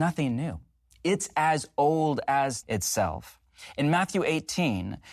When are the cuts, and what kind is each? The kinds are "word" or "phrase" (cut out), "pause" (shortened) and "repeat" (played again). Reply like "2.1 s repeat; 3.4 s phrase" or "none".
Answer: 2.6 s word